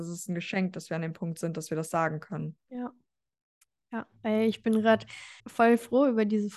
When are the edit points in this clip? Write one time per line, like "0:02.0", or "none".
0:03.6
0:05.4